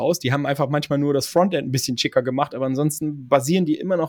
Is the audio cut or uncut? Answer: uncut